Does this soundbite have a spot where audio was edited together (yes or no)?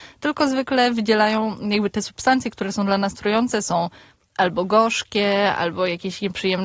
no